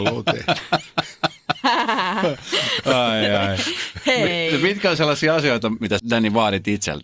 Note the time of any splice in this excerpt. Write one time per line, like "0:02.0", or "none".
0:06.0